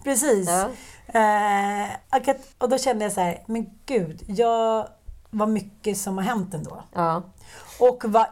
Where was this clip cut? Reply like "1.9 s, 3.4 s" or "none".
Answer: 2.0 s, 2.5 s, 5.3 s